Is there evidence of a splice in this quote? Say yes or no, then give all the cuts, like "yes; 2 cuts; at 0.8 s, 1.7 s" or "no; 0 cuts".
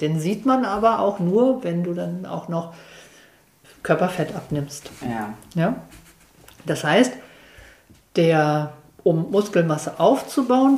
no; 0 cuts